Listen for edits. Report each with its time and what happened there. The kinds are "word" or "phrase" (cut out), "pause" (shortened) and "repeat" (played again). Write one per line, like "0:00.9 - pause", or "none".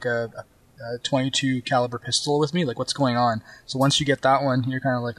none

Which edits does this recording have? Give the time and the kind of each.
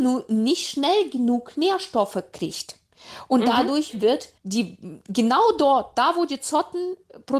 0:04.4 - pause

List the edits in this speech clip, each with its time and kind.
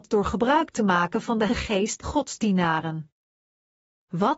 0:01.5 - word
0:02.0 - word

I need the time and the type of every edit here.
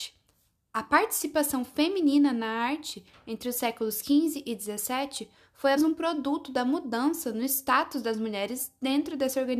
0:05.8 - word

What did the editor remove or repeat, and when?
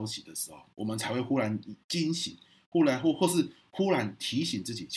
none

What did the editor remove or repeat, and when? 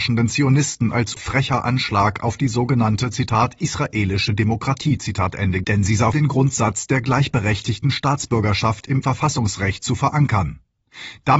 0:01.2 - word
0:05.6 - word
0:06.1 - word
0:09.0 - word

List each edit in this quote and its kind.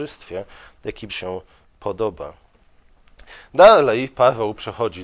0:01.1 - word

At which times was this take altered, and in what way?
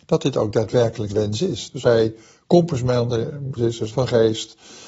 0:01.1 - word
0:01.8 - word
0:03.6 - word
0:03.9 - word

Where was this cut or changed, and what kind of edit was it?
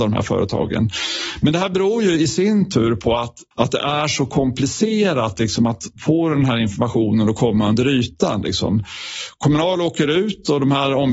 0:03.5 - pause

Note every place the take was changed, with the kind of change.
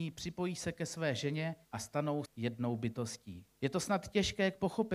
0:01.6 - pause
0:02.3 - word
0:03.5 - pause

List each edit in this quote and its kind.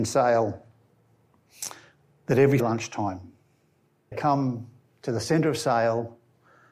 0:02.6 - word
0:04.1 - word

